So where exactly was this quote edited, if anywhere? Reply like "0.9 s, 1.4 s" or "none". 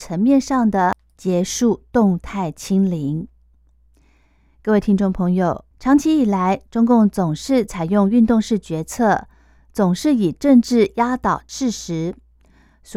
5.7 s

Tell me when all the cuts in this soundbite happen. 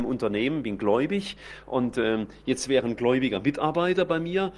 none

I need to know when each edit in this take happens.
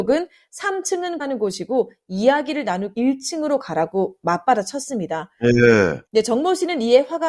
1.2 s, 2.9 s, 6.1 s

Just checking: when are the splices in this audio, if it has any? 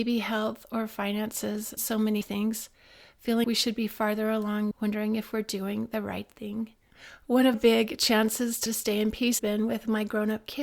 1.8 s, 2.2 s, 3.4 s, 4.7 s, 7.5 s, 8.7 s, 9.4 s

